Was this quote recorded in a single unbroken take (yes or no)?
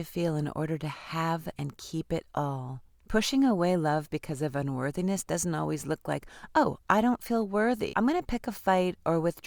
no